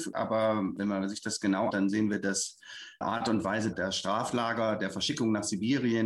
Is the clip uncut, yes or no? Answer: no